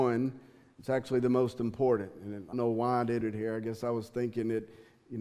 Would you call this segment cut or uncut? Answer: cut